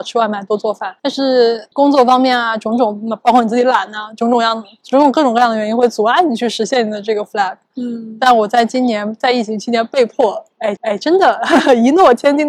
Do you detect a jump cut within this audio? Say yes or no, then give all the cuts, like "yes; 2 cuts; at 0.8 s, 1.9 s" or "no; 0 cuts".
yes; 3 cuts; at 1.0 s, 1.7 s, 10.8 s